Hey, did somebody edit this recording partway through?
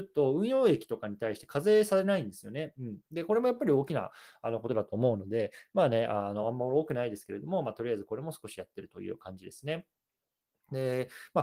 no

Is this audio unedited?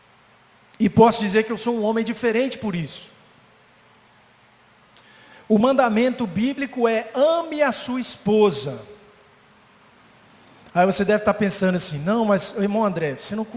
yes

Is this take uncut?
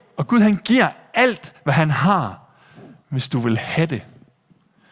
yes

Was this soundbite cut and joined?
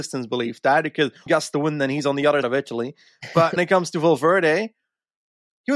yes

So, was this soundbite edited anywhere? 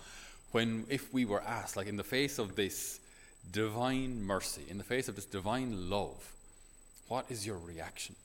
no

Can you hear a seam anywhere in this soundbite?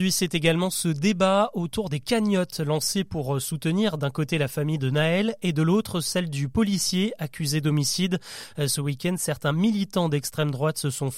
no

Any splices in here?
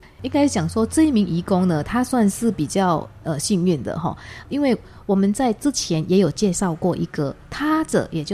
yes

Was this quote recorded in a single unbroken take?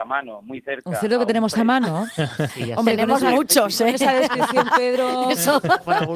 yes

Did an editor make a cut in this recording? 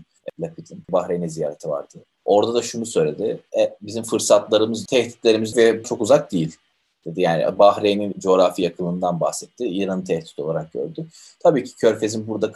yes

